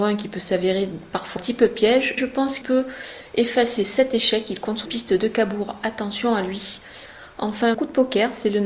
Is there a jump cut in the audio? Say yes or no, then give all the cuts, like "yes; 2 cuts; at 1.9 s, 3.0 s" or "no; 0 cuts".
yes; 6 cuts; at 1.4 s, 2.2 s, 2.6 s, 3.8 s, 4.9 s, 7.7 s